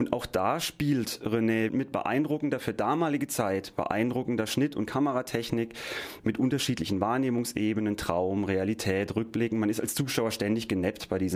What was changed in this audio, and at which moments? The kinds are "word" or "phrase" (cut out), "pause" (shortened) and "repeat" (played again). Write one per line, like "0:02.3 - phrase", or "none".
0:01.7 - phrase
0:06.2 - word